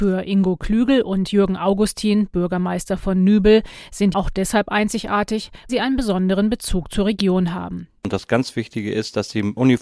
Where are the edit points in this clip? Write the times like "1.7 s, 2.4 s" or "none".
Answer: 4.1 s, 5.7 s